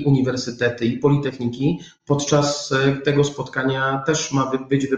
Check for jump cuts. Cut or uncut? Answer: uncut